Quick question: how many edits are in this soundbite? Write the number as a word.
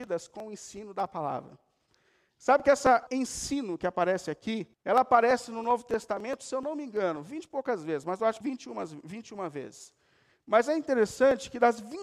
three